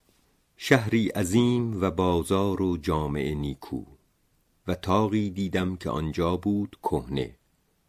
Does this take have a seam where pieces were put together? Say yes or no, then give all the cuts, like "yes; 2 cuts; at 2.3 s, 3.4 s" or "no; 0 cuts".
no; 0 cuts